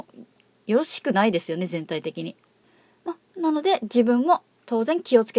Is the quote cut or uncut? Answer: cut